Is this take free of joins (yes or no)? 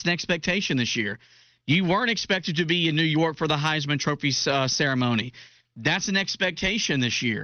yes